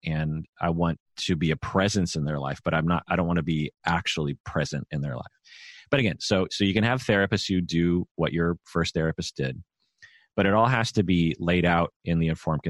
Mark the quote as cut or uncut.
uncut